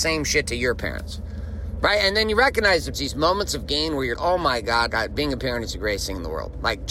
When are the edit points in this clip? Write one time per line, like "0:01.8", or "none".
0:02.9
0:04.1
0:04.9

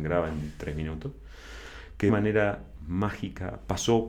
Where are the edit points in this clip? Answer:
0:02.1

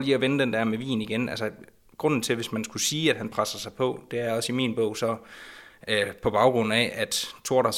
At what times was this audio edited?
none

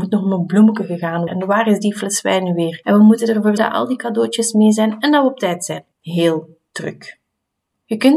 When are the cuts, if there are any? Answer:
0:01.3
0:03.6
0:05.9

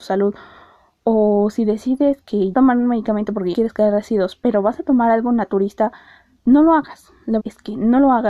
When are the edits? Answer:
0:02.5
0:03.5
0:07.4

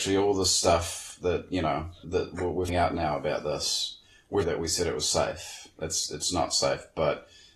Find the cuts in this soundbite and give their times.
0:02.0
0:02.7
0:04.4

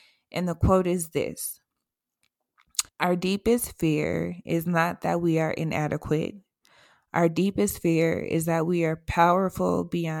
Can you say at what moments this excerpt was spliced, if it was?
0:02.9

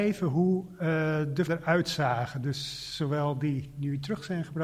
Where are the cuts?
0:01.5

